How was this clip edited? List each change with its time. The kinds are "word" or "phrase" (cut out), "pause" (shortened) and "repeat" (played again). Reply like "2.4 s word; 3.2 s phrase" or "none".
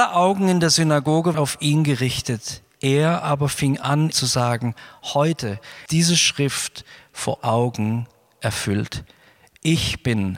1.3 s word; 4.1 s word; 5.9 s word; 7.4 s word